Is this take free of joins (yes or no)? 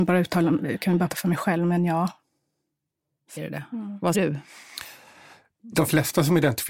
no